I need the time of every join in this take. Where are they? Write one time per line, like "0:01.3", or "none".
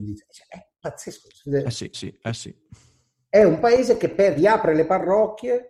0:01.9
0:04.4